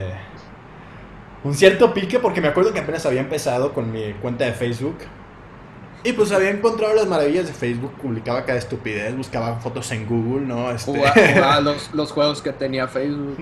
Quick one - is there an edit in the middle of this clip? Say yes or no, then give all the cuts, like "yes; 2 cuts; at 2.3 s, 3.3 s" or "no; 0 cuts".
no; 0 cuts